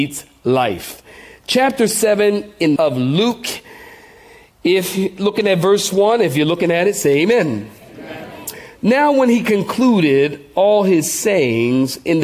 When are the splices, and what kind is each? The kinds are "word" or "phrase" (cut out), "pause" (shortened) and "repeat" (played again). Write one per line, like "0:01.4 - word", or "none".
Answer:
0:02.8 - phrase